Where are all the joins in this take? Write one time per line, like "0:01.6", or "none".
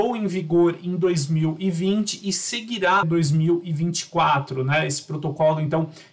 0:03.0